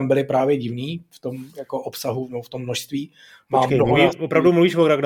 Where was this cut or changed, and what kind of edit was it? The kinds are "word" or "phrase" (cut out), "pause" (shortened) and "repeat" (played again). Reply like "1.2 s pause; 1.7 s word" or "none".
none